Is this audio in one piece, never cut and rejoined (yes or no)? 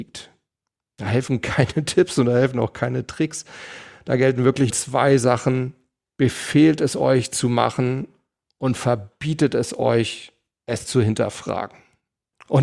no